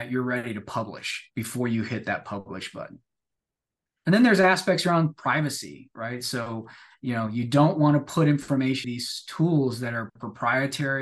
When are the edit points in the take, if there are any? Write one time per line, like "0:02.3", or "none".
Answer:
0:08.8